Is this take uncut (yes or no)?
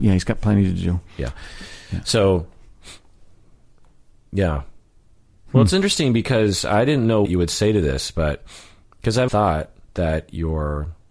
no